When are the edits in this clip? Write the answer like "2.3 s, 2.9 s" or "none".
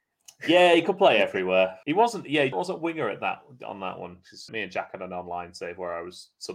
1.8 s, 2.5 s, 4.5 s